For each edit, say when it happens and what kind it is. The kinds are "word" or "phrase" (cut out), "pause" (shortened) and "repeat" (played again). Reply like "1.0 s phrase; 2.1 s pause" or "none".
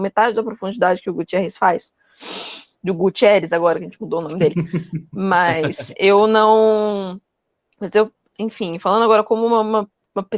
none